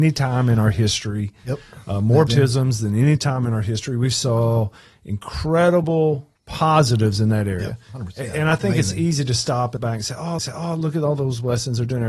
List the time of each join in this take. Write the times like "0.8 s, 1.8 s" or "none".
2.3 s, 6.4 s, 9.8 s, 10.4 s